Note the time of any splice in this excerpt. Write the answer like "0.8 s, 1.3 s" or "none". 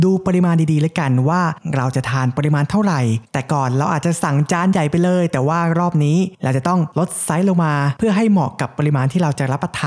none